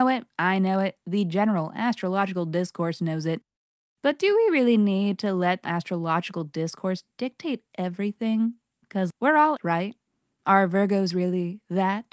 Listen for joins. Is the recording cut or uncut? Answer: cut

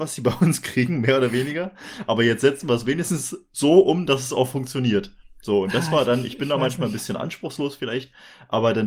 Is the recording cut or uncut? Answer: uncut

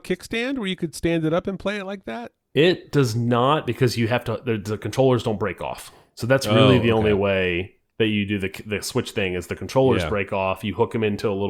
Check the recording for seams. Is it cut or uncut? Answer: uncut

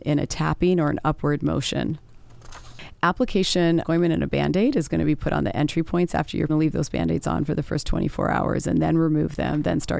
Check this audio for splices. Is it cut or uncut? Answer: cut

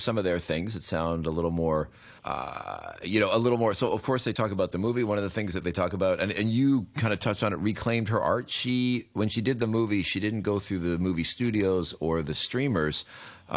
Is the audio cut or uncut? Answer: cut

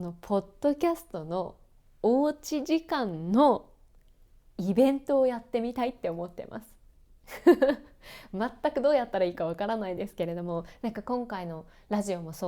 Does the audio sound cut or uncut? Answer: uncut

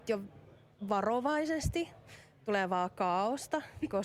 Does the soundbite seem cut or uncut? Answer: uncut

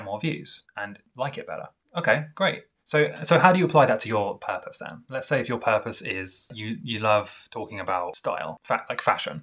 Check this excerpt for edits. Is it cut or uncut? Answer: uncut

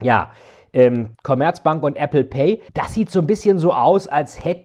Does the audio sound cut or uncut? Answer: cut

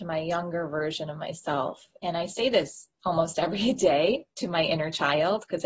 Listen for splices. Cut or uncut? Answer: uncut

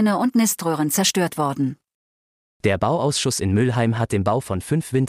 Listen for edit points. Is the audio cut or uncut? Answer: uncut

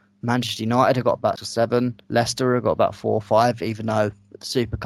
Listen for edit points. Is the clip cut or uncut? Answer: cut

